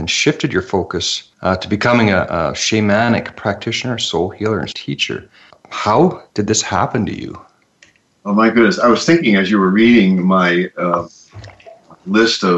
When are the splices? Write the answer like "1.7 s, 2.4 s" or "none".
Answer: 1.3 s, 4.7 s, 5.5 s